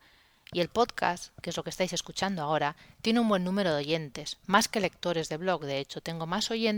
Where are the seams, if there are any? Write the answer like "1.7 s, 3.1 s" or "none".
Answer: none